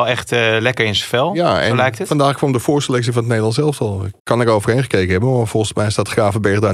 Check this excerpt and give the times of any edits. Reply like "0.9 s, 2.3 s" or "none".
4.2 s